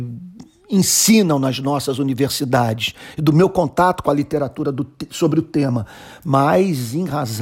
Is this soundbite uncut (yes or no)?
yes